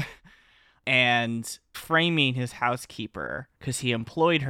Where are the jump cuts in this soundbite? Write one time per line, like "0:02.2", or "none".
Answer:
0:01.7
0:03.6